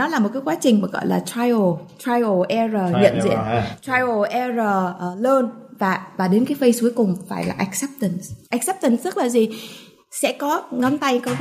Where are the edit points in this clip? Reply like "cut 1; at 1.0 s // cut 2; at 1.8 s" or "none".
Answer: cut 1; at 8.4 s